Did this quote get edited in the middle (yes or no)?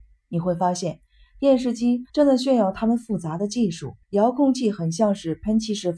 yes